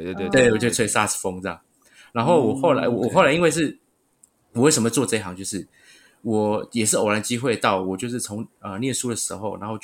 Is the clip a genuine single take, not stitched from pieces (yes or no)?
yes